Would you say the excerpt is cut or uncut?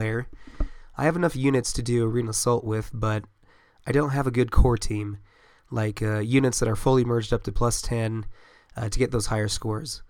uncut